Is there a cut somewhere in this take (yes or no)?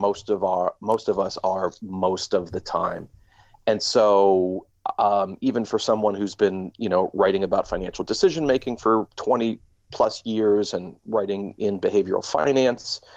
no